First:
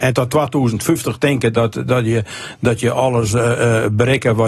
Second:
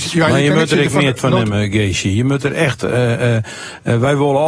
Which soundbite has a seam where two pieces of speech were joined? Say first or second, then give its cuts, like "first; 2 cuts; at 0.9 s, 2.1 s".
second; 1 cut; at 1.2 s